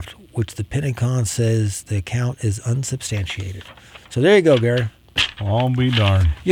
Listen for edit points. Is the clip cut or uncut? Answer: uncut